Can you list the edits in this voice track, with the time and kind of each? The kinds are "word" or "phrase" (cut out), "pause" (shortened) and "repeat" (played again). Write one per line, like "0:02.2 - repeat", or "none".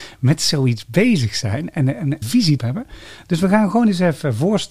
0:02.2 - word
0:02.6 - word